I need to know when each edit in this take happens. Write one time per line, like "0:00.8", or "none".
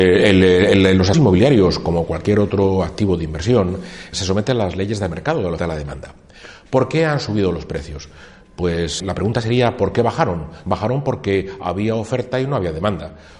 0:01.1
0:04.1
0:05.6
0:09.0